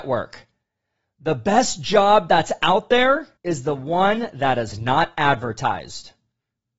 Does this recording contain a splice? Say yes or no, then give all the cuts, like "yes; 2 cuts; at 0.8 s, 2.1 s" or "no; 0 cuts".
yes; 1 cut; at 3.4 s